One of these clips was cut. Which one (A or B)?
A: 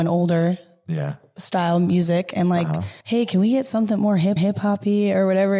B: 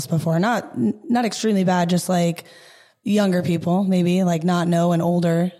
A